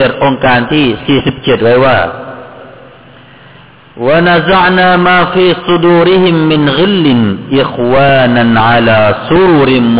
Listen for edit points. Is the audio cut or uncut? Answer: uncut